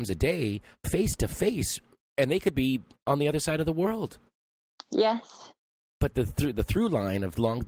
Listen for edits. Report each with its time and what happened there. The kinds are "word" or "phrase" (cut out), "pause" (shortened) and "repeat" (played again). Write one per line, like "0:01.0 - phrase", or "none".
0:06.5 - word